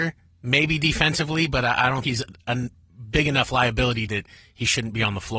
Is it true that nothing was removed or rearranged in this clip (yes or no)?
no